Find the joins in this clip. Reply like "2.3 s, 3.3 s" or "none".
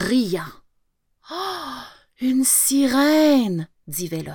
none